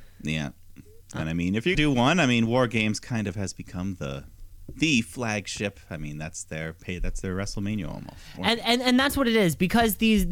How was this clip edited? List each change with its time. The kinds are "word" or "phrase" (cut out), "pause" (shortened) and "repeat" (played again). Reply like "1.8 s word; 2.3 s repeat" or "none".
1.7 s word